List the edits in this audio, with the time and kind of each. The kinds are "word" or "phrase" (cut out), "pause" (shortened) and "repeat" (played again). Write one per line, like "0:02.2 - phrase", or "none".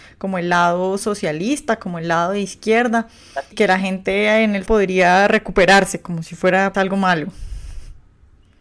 0:03.5 - word
0:04.7 - word
0:06.7 - word